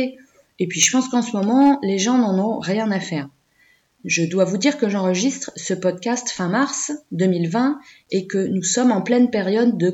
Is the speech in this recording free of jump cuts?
yes; 0 cuts

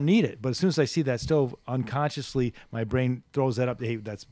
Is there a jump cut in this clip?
no; 0 cuts

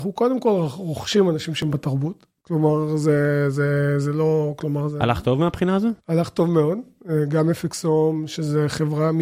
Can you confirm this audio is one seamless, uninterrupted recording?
no; 1 cut; at 6.0 s

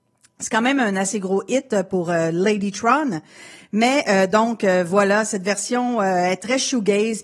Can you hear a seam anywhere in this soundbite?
no; 0 cuts

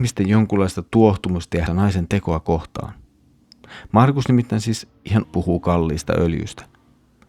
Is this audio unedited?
no; 2 cuts; at 1.7 s, 5.2 s

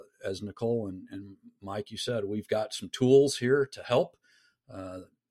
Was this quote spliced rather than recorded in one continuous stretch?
no; 0 cuts

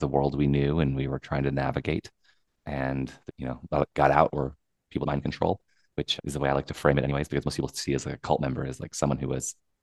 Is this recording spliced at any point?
yes; 3 cuts; at 3.3 s, 5.0 s, 6.2 s

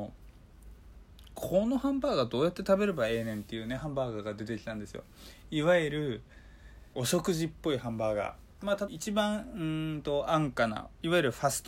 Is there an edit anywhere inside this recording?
yes; 2 cuts; at 6.9 s, 8.9 s

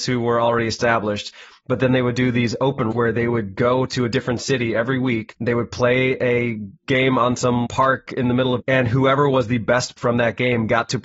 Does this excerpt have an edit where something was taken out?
yes; 5 cuts; at 2.9 s, 6.8 s, 7.6 s, 8.6 s, 10.0 s

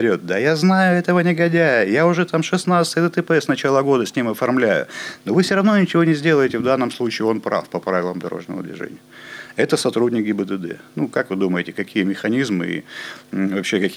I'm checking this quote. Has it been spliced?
no; 0 cuts

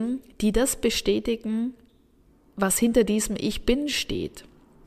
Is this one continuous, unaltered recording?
yes; 0 cuts

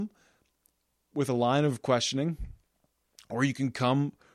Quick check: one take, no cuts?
yes; 0 cuts

